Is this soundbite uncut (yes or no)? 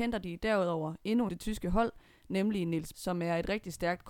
no